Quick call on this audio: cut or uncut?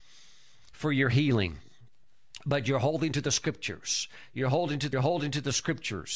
cut